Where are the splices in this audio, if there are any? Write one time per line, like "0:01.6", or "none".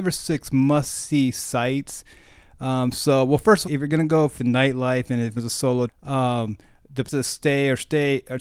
0:03.6
0:04.4
0:05.4
0:05.9
0:07.1